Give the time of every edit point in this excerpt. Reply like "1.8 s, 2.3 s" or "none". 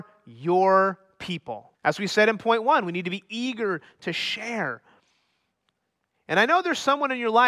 1.7 s